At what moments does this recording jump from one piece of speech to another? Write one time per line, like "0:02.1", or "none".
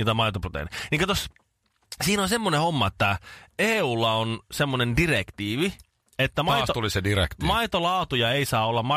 none